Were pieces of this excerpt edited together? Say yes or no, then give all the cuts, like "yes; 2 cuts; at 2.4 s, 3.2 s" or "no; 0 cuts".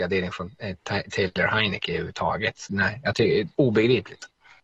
yes; 2 cuts; at 2.7 s, 3.5 s